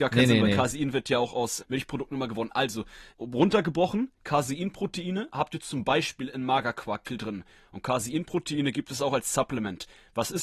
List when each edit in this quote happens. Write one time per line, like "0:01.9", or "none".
0:01.6
0:03.1
0:07.0